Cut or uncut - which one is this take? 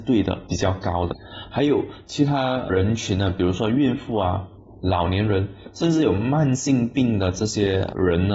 uncut